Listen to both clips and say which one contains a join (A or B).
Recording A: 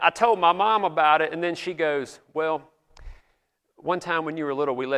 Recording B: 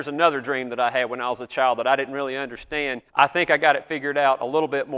B